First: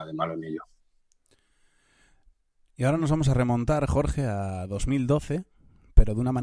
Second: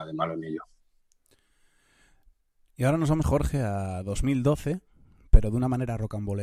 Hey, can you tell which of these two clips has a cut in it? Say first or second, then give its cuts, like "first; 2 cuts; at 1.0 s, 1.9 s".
second; 1 cut; at 3.2 s